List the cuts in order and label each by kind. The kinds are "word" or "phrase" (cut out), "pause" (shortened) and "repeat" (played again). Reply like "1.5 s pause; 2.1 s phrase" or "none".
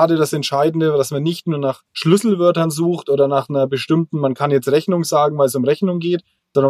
1.9 s pause